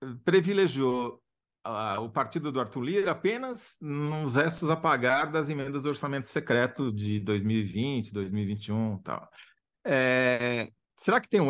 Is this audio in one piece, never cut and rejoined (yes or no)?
yes